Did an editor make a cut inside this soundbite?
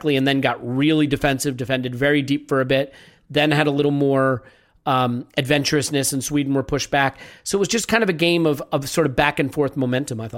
no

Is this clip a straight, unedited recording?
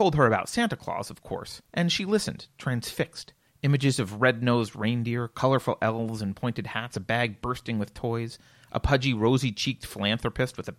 no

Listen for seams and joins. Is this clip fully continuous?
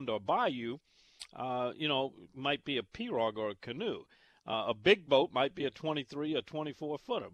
yes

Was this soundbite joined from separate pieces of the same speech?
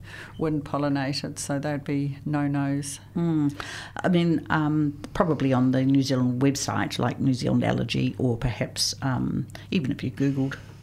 no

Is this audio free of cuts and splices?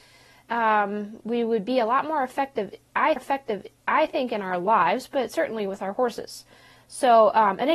no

